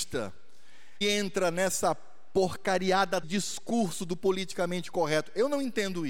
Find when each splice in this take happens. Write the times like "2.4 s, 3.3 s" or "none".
1.0 s, 3.2 s